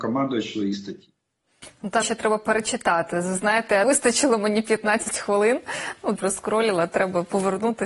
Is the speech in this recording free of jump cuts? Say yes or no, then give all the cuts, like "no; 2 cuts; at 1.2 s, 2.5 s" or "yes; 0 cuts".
no; 3 cuts; at 2.0 s, 3.8 s, 6.2 s